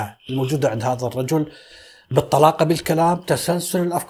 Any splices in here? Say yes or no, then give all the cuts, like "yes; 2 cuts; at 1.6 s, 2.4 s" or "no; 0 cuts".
no; 0 cuts